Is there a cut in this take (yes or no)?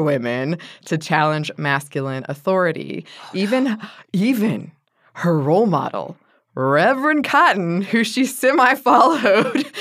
no